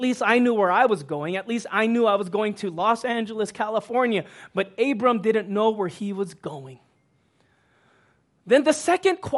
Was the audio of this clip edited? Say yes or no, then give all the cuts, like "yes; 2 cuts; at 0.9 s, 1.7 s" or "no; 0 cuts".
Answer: no; 0 cuts